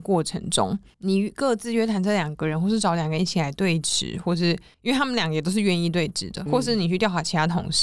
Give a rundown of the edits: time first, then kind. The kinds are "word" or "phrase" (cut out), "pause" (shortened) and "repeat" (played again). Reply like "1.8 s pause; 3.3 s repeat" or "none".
6.5 s word